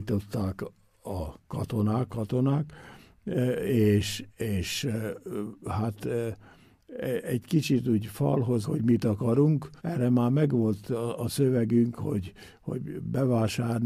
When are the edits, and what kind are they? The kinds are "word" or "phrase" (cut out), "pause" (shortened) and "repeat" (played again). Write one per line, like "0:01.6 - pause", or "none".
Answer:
0:02.1 - word
0:04.3 - pause
0:08.6 - phrase
0:09.8 - pause

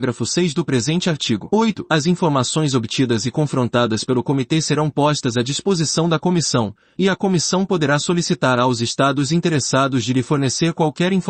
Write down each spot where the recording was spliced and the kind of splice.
none

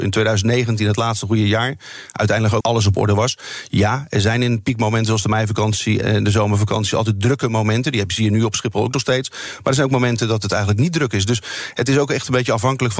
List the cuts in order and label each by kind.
0:02.6 - word
0:06.0 - word

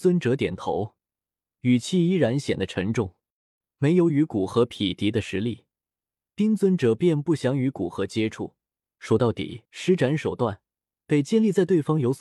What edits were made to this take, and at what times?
0:09.7 - pause

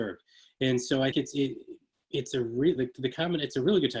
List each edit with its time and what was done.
0:01.1 - word
0:02.8 - word

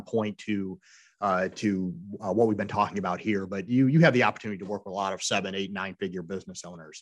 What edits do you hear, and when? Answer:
none

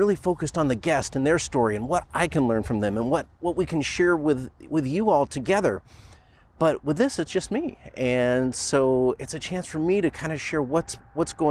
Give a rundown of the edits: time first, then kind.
none

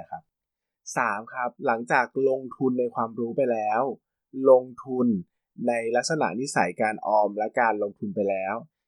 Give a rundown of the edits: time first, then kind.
0:01.6 - pause

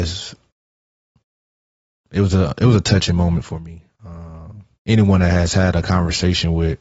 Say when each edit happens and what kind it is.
0:04.7 - pause

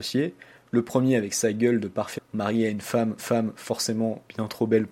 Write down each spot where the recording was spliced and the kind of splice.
0:02.2 - word
0:03.2 - repeat

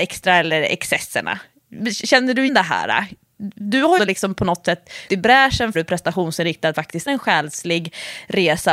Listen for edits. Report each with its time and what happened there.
0:02.5 - word
0:04.0 - word
0:05.1 - word
0:05.7 - word
0:06.7 - word
0:07.1 - word

